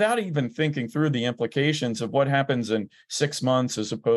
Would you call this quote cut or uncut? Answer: uncut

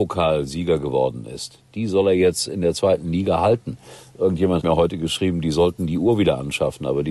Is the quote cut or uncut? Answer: cut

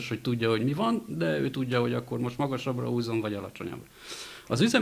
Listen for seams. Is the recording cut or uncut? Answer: uncut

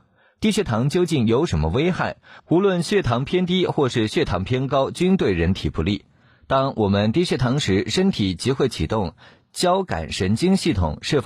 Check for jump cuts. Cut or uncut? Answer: uncut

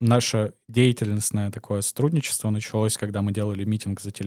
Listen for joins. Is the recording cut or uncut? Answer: uncut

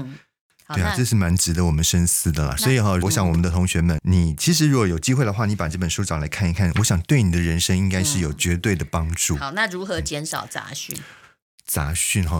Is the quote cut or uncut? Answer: cut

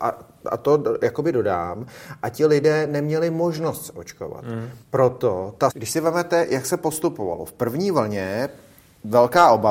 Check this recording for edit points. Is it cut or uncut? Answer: cut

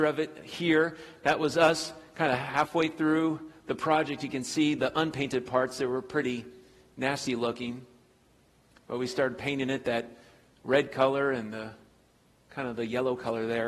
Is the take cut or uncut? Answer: uncut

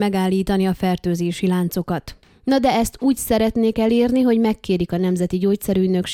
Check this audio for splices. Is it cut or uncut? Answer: uncut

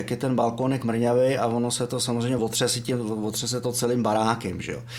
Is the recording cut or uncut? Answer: uncut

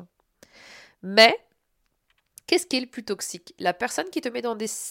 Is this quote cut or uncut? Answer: uncut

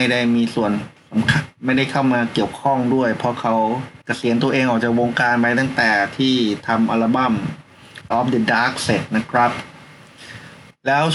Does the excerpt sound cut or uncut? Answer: cut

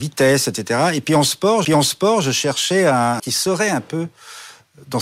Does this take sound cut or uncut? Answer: cut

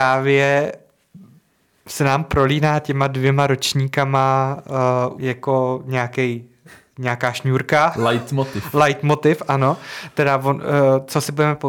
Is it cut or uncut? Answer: cut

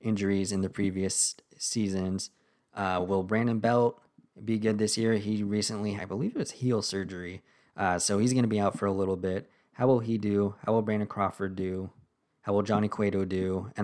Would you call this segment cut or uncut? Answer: cut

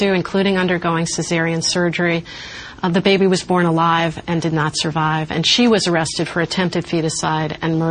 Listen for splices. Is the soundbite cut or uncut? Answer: uncut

